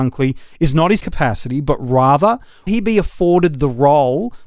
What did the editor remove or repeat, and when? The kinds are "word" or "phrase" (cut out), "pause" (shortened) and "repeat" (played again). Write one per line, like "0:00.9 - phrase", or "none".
0:01.0 - word
0:02.7 - word